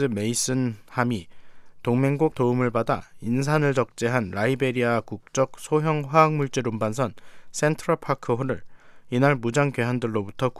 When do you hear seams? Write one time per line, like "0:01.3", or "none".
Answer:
0:02.3